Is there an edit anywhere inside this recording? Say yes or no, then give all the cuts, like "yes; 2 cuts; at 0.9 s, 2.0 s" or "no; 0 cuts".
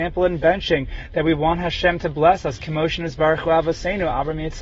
no; 0 cuts